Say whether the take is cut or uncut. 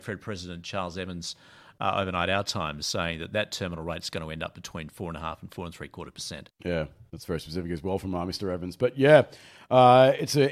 uncut